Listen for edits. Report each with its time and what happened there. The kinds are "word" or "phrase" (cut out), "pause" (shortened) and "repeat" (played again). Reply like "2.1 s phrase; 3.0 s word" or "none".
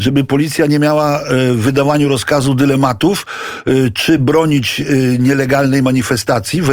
none